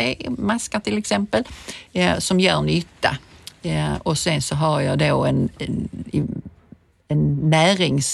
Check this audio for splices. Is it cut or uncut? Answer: uncut